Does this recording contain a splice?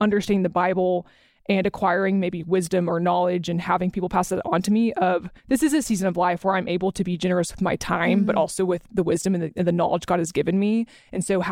yes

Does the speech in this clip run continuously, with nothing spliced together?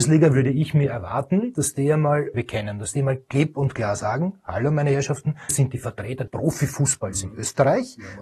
no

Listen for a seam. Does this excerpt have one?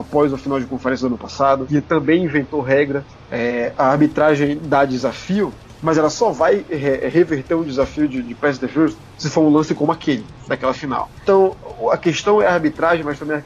no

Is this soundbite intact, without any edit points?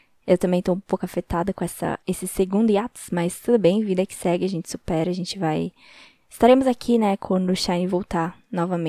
no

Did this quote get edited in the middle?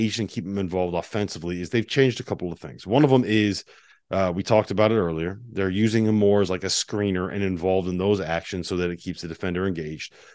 no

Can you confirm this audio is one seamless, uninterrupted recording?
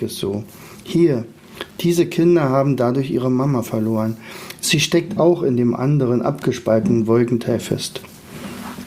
yes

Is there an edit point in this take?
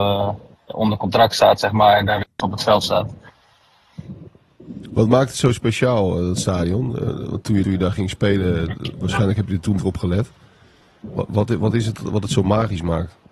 yes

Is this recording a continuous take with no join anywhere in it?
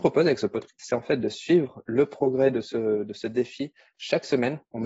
yes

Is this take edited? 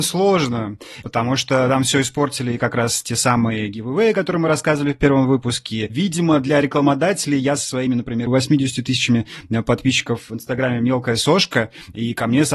no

